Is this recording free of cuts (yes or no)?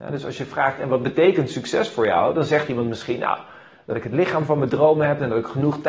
yes